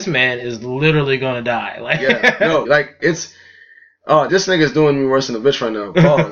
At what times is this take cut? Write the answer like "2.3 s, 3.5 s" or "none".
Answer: 2.7 s, 3.0 s, 4.3 s